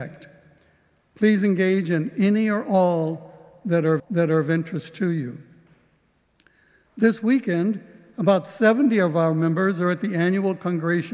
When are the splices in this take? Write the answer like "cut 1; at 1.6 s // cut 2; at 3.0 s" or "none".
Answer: cut 1; at 4.0 s